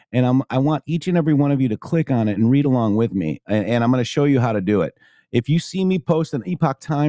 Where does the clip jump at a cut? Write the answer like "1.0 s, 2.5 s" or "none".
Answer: none